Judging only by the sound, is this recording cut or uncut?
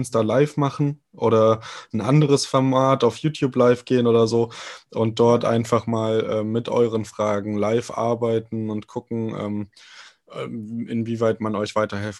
uncut